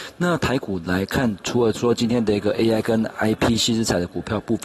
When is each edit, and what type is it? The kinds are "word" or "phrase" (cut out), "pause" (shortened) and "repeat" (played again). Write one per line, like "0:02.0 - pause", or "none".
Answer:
none